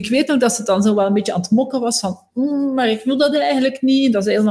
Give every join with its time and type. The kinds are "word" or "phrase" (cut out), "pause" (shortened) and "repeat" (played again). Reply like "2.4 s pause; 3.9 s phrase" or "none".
none